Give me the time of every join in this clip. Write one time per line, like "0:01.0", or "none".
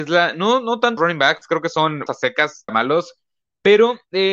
0:01.0
0:02.1
0:02.7